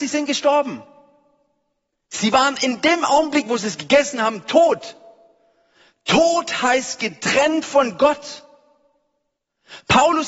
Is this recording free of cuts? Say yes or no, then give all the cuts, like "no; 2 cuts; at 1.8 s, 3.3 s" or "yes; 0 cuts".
yes; 0 cuts